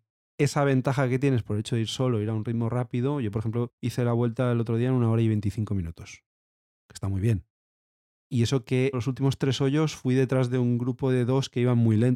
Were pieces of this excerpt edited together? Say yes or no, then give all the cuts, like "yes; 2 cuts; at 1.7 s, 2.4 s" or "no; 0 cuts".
no; 0 cuts